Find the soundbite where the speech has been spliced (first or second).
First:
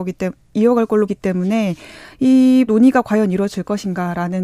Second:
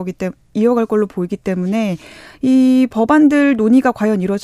first